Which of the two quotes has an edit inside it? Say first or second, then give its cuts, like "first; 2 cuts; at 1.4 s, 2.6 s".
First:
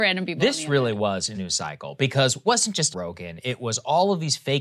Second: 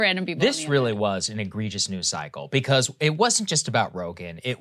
first; 3 cuts; at 1.3 s, 2.4 s, 2.9 s